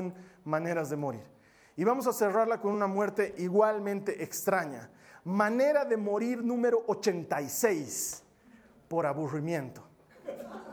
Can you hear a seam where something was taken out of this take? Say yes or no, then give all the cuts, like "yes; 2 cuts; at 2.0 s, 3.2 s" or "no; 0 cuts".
no; 0 cuts